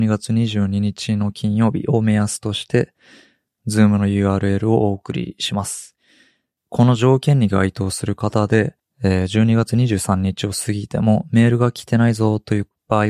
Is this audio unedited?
yes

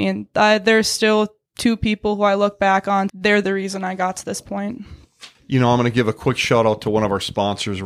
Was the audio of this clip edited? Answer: yes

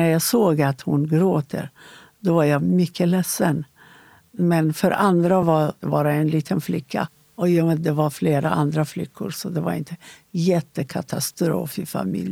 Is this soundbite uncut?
yes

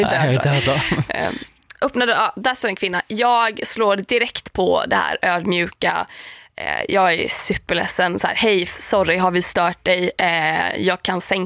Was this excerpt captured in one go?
yes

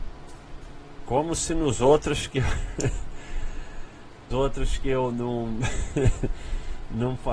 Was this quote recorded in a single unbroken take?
no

